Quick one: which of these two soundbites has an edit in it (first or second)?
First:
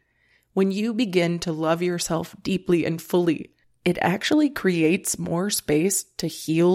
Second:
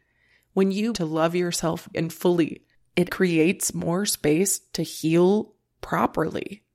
second